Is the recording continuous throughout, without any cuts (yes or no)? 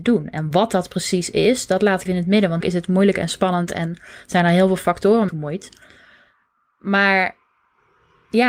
no